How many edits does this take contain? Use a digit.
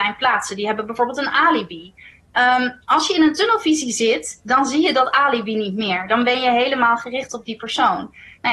0